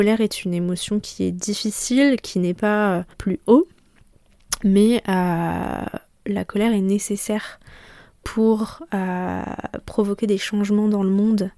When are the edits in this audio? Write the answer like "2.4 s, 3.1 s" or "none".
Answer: 3.1 s